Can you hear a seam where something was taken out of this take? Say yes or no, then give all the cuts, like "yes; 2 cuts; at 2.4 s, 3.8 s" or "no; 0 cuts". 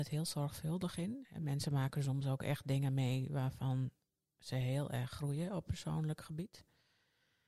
no; 0 cuts